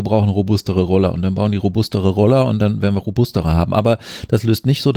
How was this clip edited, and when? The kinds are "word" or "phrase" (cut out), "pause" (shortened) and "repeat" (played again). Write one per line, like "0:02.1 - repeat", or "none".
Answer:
none